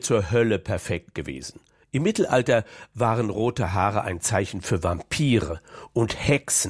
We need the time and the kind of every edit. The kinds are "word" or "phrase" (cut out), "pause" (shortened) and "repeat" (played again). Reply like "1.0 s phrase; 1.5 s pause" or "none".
none